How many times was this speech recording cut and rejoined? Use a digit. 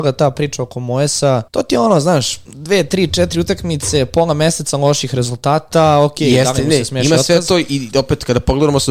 2